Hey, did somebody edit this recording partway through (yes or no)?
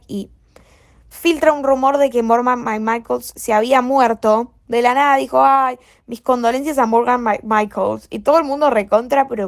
no